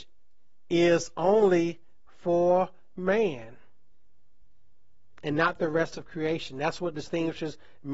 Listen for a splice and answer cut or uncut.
uncut